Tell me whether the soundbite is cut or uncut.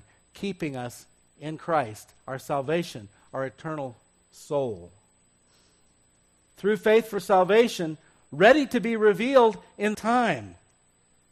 cut